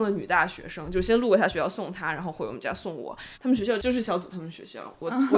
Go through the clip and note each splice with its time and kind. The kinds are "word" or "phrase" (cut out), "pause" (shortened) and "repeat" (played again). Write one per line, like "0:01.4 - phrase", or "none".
0:03.3 - pause